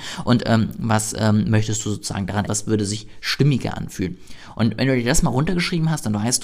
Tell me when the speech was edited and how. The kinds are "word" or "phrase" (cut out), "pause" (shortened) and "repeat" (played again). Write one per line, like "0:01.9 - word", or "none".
0:02.5 - phrase